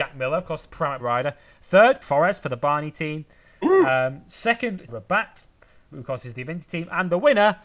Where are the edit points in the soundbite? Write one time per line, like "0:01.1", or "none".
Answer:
0:01.0
0:02.0
0:04.9
0:05.9